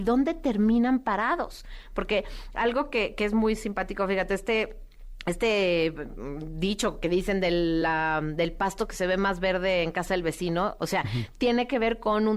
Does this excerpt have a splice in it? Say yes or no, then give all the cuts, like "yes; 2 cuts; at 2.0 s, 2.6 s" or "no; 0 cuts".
no; 0 cuts